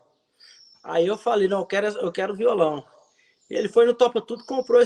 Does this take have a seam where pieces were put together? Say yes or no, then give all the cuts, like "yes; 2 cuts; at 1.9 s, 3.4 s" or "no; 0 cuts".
no; 0 cuts